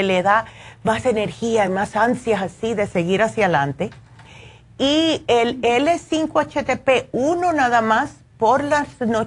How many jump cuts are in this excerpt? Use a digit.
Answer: 0